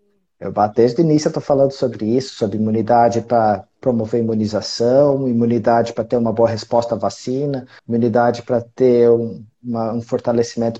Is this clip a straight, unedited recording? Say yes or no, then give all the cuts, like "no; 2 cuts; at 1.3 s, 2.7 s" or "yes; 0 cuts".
no; 1 cut; at 7.8 s